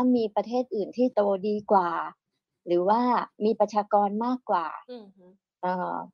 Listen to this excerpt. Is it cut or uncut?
cut